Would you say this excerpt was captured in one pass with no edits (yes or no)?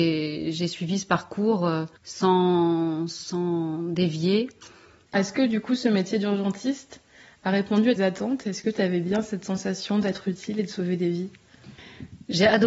no